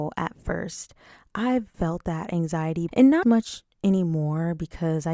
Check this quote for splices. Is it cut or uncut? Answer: cut